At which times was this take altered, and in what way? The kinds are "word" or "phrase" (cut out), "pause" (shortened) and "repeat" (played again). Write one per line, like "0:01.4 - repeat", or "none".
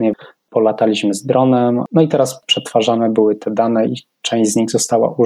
none